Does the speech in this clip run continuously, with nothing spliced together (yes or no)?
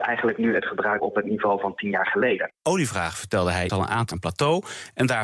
no